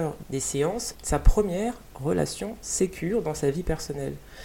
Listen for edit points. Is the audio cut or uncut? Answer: uncut